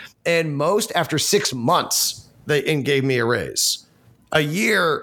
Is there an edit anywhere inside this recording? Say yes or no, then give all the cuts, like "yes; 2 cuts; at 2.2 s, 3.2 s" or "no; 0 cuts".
no; 0 cuts